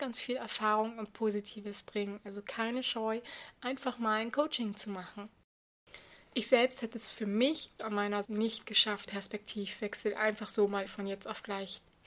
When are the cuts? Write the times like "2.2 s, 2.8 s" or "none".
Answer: 7.8 s, 8.2 s, 9.1 s, 10.9 s